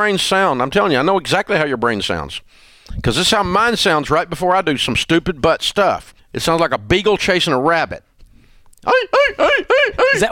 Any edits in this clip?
yes; 1 cut; at 6.2 s

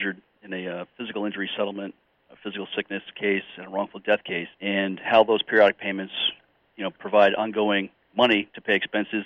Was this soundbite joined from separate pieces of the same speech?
yes; 2 cuts; at 4.5 s, 8.1 s

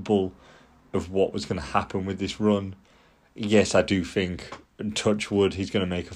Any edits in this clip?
no; 0 cuts

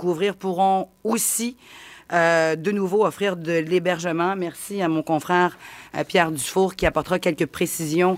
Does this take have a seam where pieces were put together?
no; 0 cuts

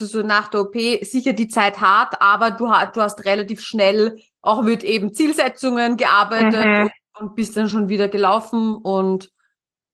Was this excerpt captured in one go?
yes; 0 cuts

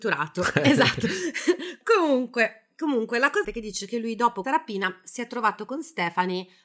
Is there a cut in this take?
yes; 2 cuts; at 3.4 s, 4.4 s

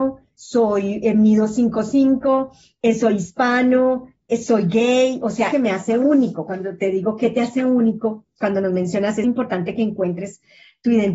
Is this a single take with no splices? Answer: no; 2 cuts; at 5.5 s, 9.2 s

